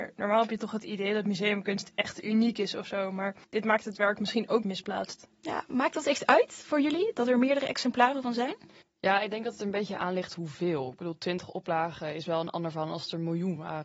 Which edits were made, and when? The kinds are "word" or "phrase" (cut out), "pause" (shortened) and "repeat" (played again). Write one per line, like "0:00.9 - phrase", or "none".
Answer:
0:03.4 - pause
0:04.6 - phrase
0:08.8 - pause